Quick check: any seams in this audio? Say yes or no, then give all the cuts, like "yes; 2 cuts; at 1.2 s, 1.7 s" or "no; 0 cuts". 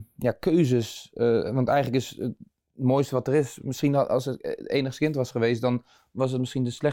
no; 0 cuts